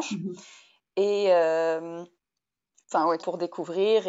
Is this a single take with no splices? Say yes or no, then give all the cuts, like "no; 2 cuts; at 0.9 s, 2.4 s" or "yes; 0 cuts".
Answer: no; 1 cut; at 3.2 s